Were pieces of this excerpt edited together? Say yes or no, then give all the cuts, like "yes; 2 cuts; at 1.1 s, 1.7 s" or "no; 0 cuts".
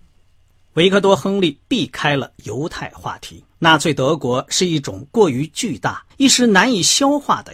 yes; 3 cuts; at 1.6 s, 3.5 s, 6.1 s